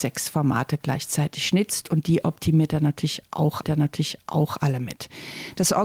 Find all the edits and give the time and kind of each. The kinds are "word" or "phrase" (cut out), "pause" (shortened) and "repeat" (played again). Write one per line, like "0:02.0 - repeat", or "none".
0:03.6 - repeat